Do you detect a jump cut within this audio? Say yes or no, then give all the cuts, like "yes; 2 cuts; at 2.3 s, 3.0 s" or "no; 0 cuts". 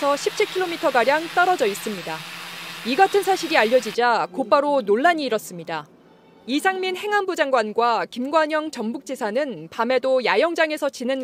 no; 0 cuts